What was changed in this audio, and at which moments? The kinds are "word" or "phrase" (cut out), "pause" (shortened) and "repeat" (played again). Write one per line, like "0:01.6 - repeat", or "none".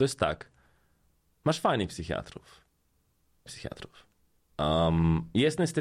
0:03.5 - phrase